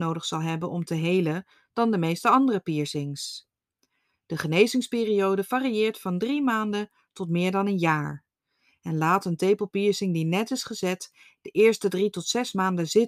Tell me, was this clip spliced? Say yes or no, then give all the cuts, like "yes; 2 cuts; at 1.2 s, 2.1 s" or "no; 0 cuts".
no; 0 cuts